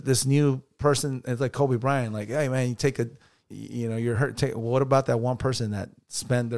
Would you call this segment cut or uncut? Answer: cut